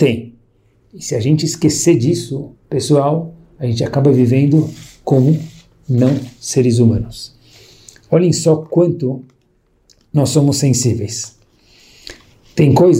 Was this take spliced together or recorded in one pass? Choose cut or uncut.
cut